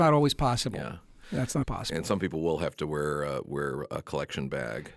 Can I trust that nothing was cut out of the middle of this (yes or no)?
no